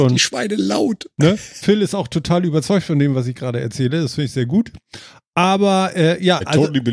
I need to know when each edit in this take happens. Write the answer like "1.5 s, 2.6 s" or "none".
none